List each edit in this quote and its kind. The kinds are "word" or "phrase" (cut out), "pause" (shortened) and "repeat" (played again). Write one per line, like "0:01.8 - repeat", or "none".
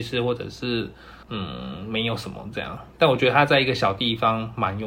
0:01.2 - pause